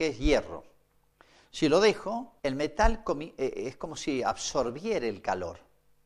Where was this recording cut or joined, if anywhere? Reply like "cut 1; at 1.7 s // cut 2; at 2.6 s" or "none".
cut 1; at 2.4 s